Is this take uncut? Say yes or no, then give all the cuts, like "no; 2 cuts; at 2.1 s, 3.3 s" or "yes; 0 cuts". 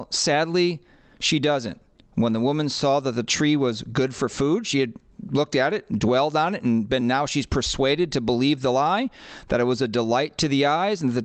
yes; 0 cuts